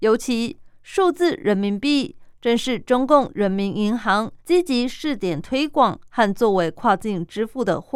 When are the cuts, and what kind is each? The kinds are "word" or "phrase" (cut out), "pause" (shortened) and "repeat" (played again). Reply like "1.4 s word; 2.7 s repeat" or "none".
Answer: 4.4 s pause